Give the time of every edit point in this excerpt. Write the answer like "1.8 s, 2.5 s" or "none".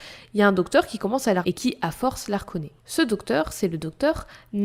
1.4 s, 2.8 s

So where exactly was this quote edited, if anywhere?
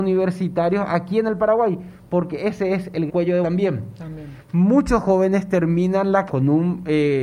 3.1 s, 3.4 s, 6.3 s

